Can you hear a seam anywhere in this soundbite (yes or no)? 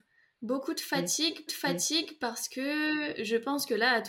yes